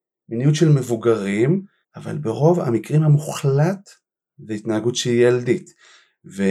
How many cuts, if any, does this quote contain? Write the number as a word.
one